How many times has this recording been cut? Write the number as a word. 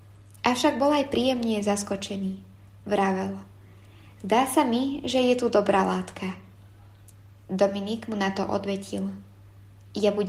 zero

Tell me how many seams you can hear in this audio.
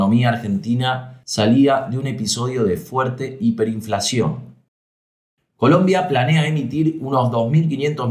zero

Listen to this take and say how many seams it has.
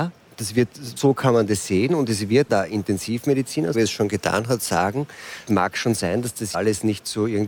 five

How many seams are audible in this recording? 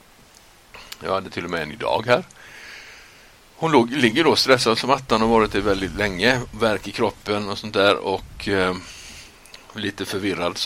zero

